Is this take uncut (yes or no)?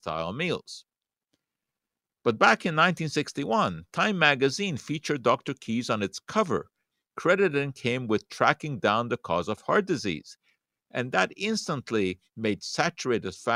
yes